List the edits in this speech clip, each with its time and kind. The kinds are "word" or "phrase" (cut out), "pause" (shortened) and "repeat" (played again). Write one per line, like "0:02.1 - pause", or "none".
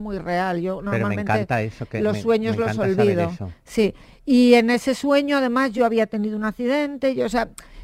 none